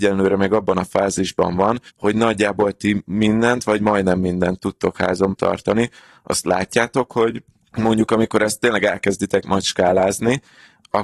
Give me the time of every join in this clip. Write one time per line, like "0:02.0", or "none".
0:01.9
0:05.3